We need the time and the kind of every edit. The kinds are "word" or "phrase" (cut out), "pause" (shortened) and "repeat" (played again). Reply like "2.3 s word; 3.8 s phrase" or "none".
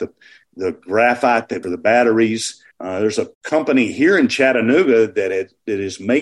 1.6 s phrase; 2.7 s pause; 3.3 s pause